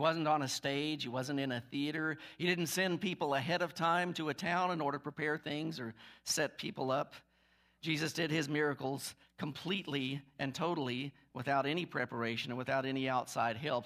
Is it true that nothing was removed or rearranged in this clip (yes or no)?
yes